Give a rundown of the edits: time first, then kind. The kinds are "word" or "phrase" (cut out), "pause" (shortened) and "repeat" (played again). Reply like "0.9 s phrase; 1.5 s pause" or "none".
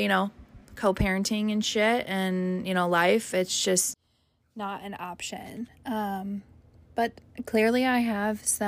none